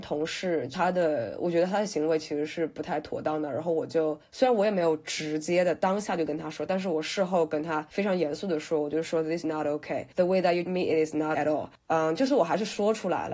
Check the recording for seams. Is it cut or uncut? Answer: cut